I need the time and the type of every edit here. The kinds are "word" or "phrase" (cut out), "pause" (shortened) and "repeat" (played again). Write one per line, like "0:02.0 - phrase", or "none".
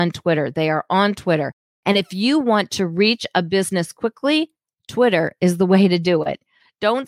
none